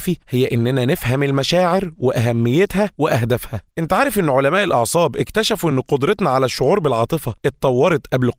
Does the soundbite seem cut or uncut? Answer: uncut